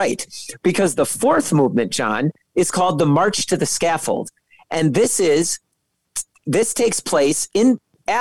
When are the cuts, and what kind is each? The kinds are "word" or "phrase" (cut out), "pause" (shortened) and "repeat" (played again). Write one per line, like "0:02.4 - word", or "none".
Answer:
none